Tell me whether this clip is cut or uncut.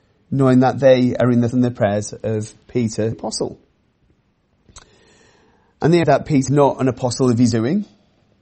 cut